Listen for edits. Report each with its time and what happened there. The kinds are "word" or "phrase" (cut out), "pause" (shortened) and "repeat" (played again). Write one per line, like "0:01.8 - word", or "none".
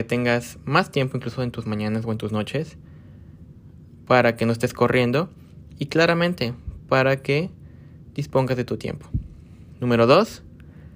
none

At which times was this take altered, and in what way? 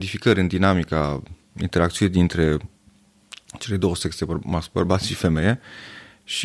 none

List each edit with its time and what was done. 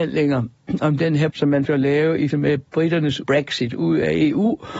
0:01.3 - word
0:01.7 - word
0:02.3 - word
0:03.2 - word

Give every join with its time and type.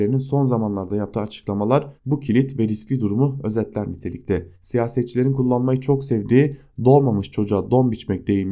0:02.0 - pause
0:04.5 - pause

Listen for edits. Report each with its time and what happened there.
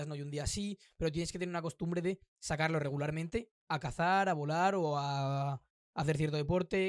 none

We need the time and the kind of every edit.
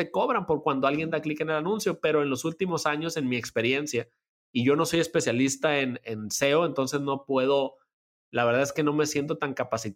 none

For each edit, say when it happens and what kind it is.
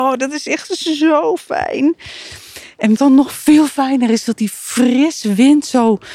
0:03.0 - phrase

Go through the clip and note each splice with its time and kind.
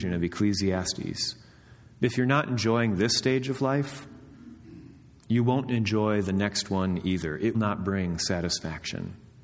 0:07.5 - word

